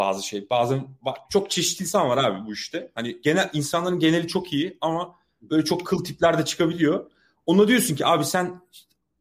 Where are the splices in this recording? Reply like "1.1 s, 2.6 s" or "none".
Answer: none